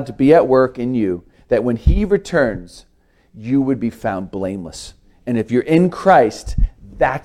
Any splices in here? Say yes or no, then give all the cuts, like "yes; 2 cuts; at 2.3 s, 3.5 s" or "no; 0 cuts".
no; 0 cuts